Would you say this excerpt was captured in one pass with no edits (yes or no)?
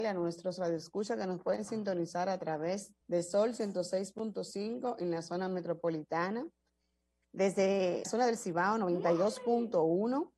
no